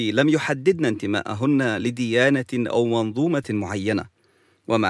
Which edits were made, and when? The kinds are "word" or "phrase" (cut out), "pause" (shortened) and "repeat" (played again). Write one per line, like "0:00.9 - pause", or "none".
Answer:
0:03.4 - word